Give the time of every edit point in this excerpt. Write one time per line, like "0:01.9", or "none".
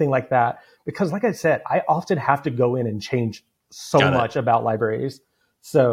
none